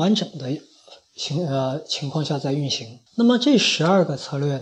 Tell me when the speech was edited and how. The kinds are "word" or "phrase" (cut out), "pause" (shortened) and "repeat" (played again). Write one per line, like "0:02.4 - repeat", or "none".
0:03.1 - pause